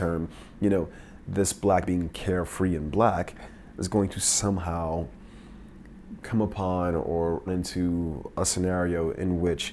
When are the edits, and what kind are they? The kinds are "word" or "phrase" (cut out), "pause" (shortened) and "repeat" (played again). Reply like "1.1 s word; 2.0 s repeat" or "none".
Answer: 1.9 s word; 7.5 s word